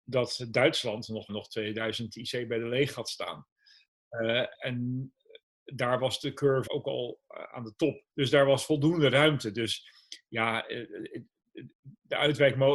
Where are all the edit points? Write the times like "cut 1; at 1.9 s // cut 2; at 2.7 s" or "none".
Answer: cut 1; at 1.3 s // cut 2; at 4.5 s // cut 3; at 6.7 s // cut 4; at 8.1 s